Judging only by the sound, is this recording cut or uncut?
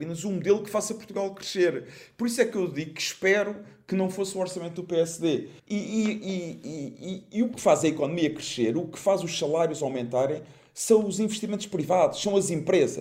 cut